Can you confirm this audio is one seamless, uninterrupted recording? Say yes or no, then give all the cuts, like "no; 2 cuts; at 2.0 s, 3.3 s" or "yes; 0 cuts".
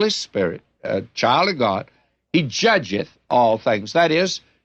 yes; 0 cuts